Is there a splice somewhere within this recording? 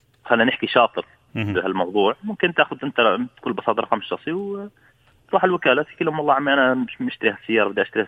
no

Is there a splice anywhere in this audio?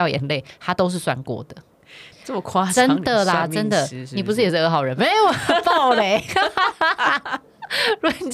yes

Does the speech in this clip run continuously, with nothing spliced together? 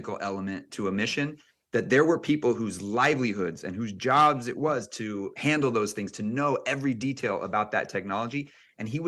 yes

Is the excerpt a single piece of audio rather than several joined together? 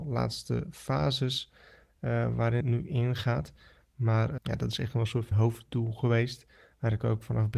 no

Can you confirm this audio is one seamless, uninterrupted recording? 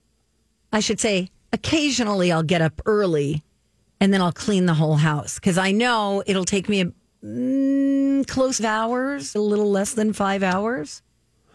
no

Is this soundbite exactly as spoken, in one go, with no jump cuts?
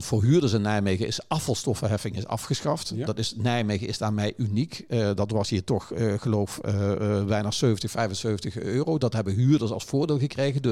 yes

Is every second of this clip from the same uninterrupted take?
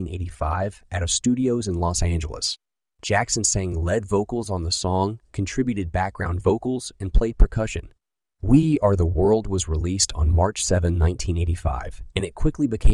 yes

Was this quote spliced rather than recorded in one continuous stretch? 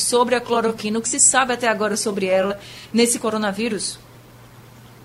yes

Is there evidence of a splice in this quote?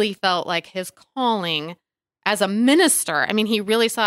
no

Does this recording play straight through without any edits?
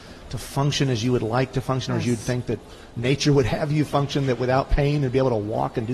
yes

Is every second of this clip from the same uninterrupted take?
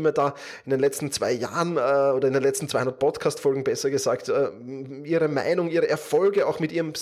yes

